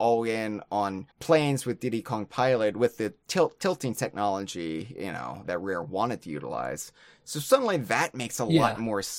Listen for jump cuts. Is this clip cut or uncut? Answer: cut